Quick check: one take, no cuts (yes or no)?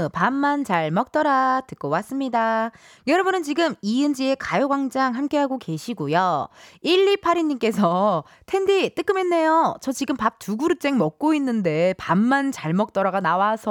yes